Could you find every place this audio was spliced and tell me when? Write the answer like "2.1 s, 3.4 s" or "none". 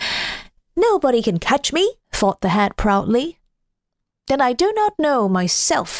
2.0 s